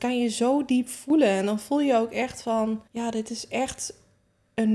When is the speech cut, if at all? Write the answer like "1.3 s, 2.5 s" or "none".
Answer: 2.9 s